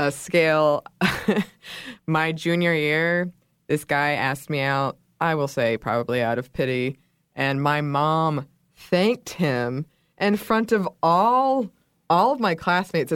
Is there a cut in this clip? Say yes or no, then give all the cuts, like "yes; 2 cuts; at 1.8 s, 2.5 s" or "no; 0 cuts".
no; 0 cuts